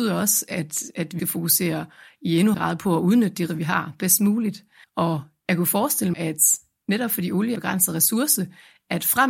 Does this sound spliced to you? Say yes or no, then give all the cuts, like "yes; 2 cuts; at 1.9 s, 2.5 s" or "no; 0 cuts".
yes; 6 cuts; at 1.2 s, 2.5 s, 3.5 s, 4.8 s, 6.1 s, 7.6 s